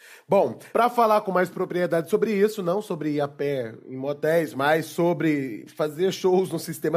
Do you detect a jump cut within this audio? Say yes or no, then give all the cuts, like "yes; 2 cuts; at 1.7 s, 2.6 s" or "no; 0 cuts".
no; 0 cuts